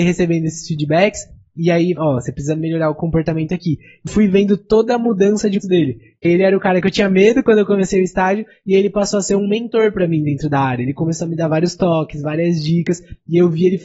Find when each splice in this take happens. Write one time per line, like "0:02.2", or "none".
0:02.0
0:04.1
0:05.6
0:06.2